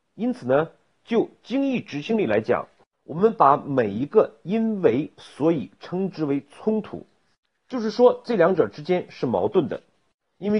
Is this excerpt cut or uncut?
uncut